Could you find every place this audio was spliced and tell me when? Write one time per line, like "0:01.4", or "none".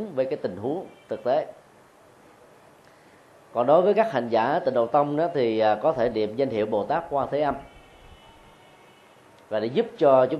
none